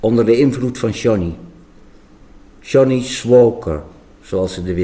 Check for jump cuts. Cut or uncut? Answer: uncut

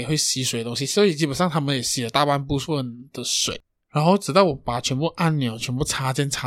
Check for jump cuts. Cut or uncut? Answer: uncut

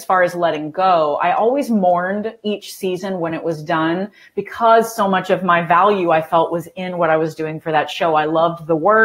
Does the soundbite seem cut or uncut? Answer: uncut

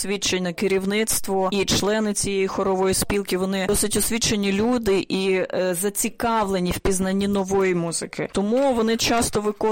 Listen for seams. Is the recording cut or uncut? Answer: uncut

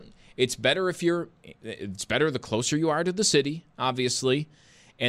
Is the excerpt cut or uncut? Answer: uncut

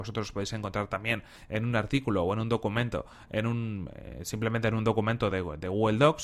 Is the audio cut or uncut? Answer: uncut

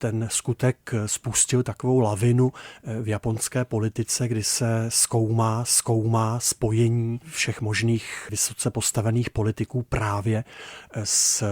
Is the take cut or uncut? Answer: cut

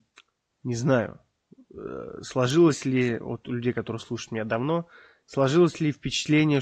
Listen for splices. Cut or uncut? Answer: uncut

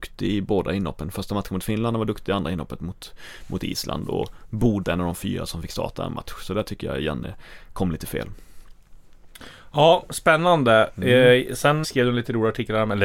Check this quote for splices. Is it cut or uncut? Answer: cut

